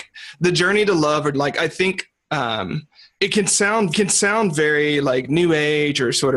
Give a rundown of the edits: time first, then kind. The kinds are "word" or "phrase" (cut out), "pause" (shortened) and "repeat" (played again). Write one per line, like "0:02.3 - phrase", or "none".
0:01.3 - word
0:03.9 - repeat